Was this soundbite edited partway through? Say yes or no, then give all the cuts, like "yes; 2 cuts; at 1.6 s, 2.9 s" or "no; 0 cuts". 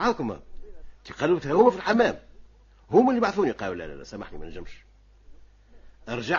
no; 0 cuts